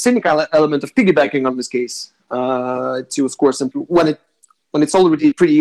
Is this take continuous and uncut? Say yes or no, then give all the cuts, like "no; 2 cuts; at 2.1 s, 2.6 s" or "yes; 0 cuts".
no; 1 cut; at 3.7 s